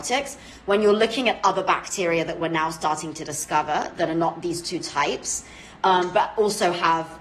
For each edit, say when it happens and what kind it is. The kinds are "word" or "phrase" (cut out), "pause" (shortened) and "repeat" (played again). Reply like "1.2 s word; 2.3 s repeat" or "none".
none